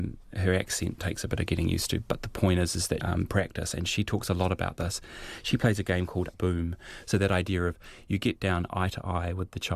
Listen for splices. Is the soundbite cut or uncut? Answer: cut